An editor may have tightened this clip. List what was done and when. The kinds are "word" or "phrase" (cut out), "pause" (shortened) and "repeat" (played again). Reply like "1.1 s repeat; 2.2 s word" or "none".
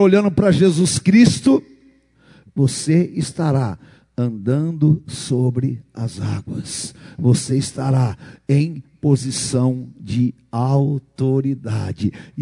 none